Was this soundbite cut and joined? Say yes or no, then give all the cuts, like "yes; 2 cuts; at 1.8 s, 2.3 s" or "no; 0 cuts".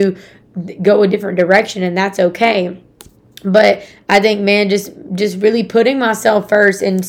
no; 0 cuts